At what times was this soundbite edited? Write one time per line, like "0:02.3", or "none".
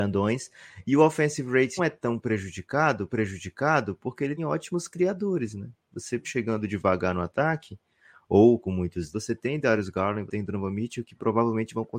0:01.8
0:03.1
0:04.4
0:06.2
0:08.6
0:09.1
0:10.3